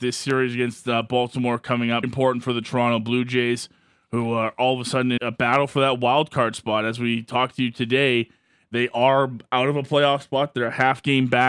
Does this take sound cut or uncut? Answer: cut